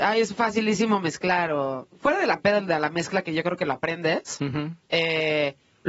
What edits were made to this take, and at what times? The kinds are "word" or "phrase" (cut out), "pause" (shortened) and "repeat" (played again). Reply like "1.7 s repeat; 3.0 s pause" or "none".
none